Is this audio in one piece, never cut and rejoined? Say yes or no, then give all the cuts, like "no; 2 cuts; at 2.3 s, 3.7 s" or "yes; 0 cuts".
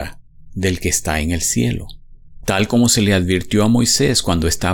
yes; 0 cuts